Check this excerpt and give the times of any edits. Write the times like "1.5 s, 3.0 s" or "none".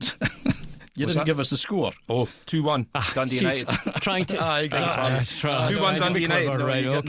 none